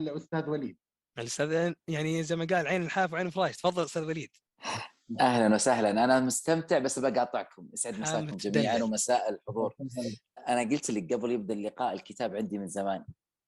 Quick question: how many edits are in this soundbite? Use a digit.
1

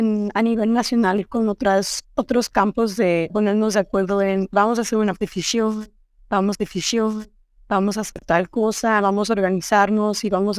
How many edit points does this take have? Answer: 2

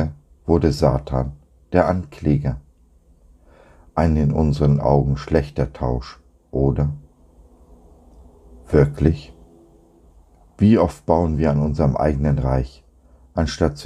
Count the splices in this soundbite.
0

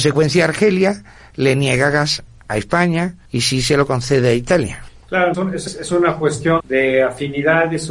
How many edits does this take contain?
3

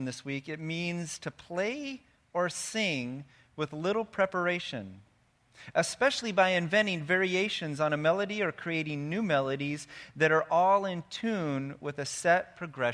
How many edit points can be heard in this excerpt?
0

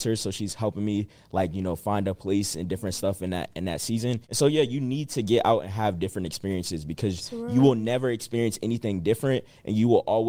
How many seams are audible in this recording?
1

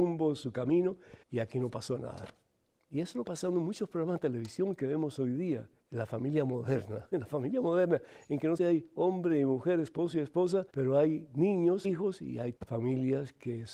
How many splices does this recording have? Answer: 8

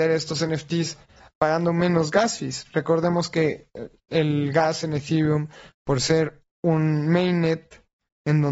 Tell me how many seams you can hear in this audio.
0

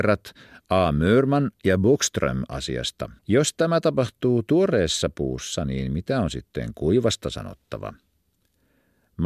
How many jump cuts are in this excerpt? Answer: 1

